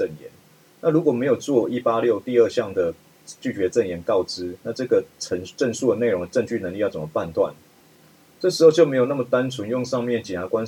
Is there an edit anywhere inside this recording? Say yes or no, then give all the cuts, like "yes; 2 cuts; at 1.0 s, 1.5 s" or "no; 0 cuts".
no; 0 cuts